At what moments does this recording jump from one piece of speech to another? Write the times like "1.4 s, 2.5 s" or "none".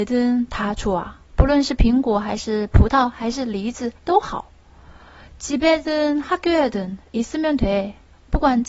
4.0 s